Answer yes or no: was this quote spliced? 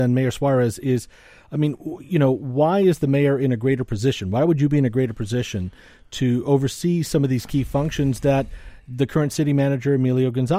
no